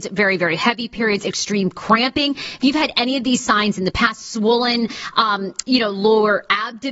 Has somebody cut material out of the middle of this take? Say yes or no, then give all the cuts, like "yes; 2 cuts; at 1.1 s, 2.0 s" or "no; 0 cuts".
no; 0 cuts